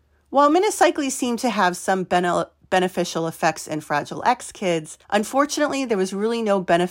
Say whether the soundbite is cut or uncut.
cut